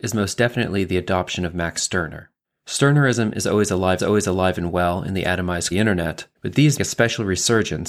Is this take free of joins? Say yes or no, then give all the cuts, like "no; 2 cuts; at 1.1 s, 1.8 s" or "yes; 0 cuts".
no; 5 cuts; at 2.4 s, 4.0 s, 5.7 s, 6.3 s, 6.8 s